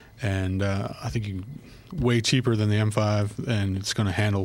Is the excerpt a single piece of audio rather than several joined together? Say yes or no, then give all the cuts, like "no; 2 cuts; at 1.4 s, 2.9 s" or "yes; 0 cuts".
yes; 0 cuts